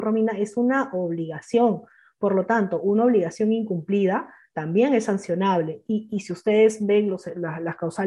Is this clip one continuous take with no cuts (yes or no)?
yes